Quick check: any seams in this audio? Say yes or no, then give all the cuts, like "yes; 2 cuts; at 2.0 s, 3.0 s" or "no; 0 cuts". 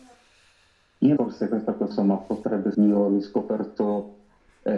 yes; 3 cuts; at 1.2 s, 1.9 s, 2.7 s